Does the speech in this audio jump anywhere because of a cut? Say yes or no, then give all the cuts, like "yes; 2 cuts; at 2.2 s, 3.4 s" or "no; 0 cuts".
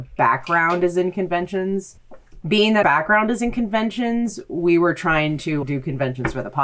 yes; 2 cuts; at 2.8 s, 5.6 s